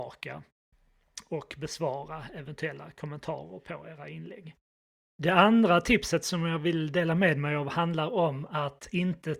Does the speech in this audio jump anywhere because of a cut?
no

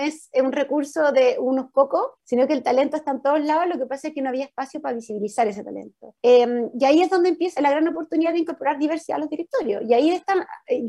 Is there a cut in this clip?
yes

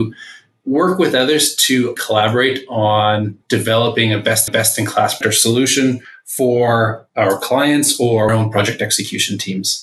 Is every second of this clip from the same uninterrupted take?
no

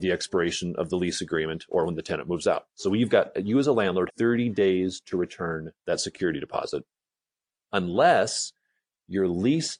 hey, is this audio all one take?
no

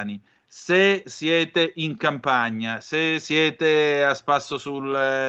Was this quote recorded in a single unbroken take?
yes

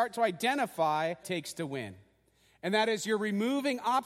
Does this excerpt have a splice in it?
yes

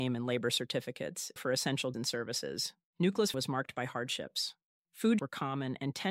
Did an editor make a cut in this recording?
yes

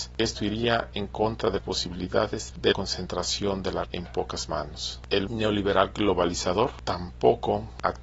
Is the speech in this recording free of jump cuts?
no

